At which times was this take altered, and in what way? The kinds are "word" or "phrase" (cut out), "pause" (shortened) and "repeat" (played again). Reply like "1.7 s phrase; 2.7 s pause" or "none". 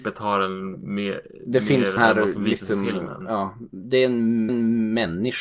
2.0 s word; 4.5 s repeat